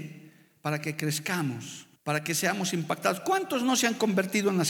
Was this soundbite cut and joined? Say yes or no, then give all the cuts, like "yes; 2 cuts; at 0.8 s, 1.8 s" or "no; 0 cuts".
yes; 1 cut; at 2.0 s